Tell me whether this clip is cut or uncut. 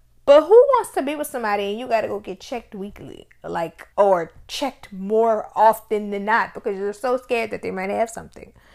cut